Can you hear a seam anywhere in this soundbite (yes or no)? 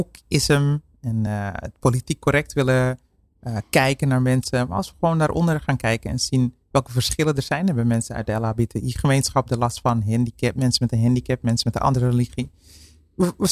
no